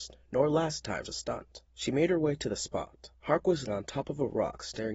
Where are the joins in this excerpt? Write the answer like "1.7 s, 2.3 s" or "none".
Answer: 1.0 s, 1.6 s, 3.1 s, 3.7 s